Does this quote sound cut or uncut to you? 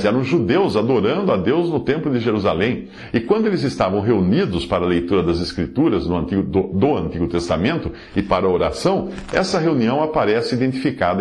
uncut